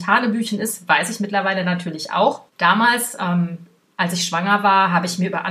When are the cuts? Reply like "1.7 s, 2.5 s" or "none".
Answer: 2.5 s